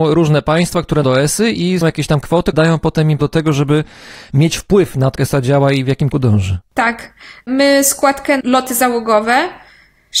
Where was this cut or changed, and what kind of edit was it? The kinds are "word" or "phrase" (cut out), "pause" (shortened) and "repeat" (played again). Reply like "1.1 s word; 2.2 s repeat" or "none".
1.0 s word; 1.8 s word; 2.2 s word; 2.5 s word; 3.2 s word; 5.2 s word; 6.1 s word; 8.4 s word